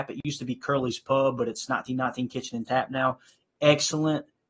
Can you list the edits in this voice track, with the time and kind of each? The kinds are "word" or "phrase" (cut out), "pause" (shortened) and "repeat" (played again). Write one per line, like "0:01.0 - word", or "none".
none